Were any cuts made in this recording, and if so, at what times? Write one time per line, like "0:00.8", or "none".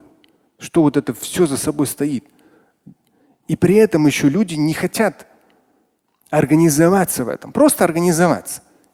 none